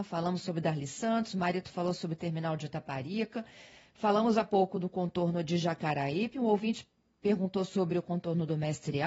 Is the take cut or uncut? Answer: uncut